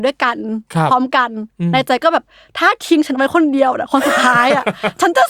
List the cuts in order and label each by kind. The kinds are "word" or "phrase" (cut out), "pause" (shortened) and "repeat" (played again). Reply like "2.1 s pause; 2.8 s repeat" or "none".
none